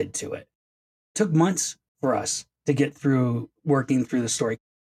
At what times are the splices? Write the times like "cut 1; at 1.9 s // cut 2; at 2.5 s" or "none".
none